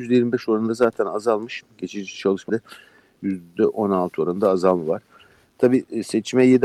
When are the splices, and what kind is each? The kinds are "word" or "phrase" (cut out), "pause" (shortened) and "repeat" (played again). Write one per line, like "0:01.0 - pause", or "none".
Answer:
0:02.5 - word